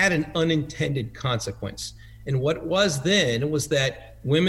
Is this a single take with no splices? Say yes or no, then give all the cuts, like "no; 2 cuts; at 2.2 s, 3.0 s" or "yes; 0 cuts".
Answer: yes; 0 cuts